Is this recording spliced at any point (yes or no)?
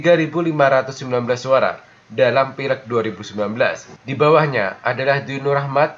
no